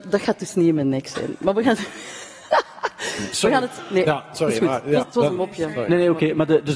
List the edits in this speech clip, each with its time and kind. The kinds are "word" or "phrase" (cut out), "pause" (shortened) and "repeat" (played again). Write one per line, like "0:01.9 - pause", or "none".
0:03.3 - word
0:05.0 - word

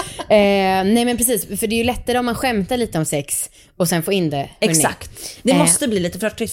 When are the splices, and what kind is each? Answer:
none

